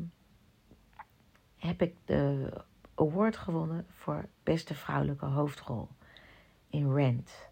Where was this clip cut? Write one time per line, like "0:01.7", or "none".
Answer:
0:04.3